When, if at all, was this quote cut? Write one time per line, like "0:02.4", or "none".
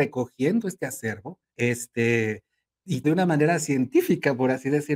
0:01.5
0:03.0